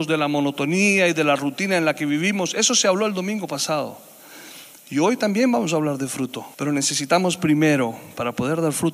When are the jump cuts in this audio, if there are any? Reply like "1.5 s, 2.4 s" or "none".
6.5 s